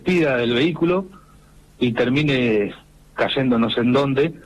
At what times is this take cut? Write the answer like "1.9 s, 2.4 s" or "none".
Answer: none